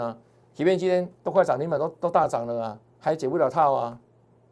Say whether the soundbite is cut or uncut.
cut